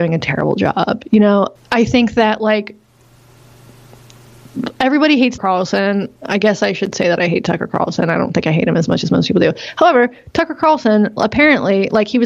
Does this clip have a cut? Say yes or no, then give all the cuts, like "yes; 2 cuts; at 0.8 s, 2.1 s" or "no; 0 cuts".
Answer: yes; 2 cuts; at 1.6 s, 5.4 s